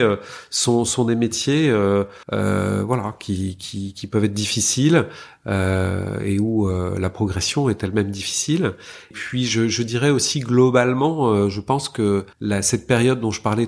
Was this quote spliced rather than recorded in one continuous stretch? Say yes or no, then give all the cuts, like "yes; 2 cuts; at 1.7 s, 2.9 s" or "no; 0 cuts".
yes; 3 cuts; at 2.2 s, 9.1 s, 12.3 s